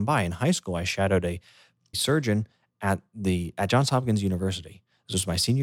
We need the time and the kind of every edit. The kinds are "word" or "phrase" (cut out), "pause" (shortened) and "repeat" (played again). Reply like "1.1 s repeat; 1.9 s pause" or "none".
1.9 s word